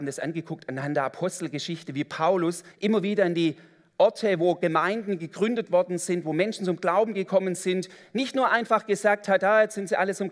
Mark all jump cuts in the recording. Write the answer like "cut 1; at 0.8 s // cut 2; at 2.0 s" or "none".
cut 1; at 2.7 s